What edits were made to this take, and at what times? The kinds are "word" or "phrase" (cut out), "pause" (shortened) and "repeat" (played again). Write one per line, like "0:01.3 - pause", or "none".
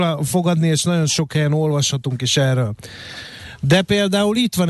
none